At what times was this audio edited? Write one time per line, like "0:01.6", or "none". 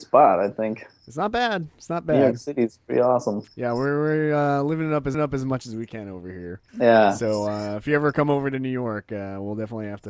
0:03.5
0:05.1
0:06.7